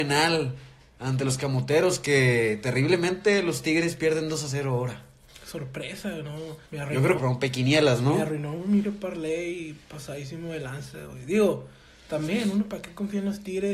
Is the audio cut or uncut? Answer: cut